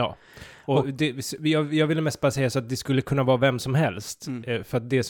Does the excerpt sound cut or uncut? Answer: uncut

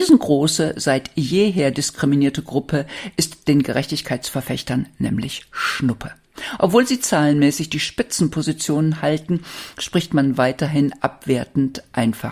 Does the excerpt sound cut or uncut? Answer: uncut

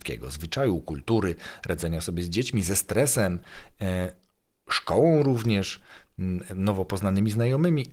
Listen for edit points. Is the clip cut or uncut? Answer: uncut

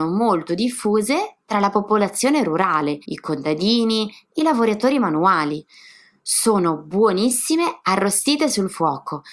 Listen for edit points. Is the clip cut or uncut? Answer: cut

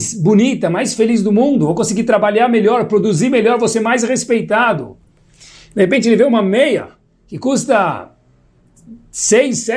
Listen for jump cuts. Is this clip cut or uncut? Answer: uncut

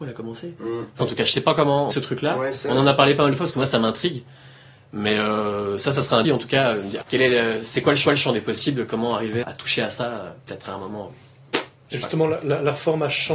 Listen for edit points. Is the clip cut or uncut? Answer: cut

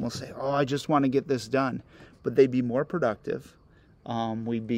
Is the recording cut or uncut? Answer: uncut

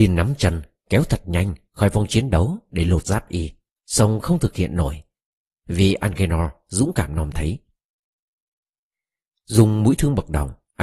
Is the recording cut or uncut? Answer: uncut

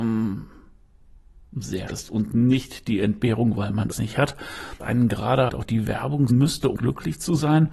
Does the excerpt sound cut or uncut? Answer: cut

